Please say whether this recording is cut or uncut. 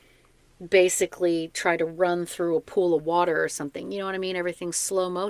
uncut